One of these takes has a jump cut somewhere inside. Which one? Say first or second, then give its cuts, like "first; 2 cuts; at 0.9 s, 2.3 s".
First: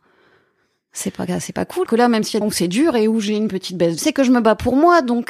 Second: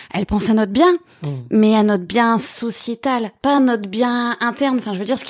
first; 3 cuts; at 1.9 s, 2.4 s, 4.0 s